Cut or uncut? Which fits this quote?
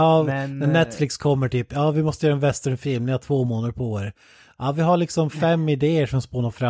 uncut